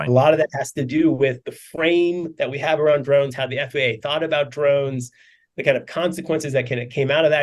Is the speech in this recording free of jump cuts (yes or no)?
no